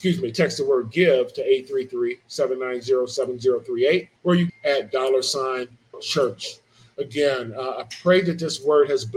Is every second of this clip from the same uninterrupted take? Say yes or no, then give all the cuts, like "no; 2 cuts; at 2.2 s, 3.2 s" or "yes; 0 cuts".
no; 3 cuts; at 4.2 s, 4.5 s, 5.9 s